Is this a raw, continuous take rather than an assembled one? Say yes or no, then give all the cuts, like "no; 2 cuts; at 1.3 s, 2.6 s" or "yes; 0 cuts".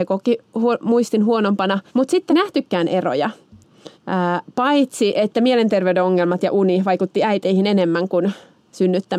no; 3 cuts; at 1.9 s, 2.3 s, 3.9 s